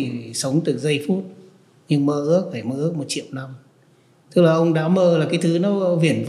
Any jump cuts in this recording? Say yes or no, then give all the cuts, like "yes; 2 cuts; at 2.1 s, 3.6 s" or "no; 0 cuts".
no; 0 cuts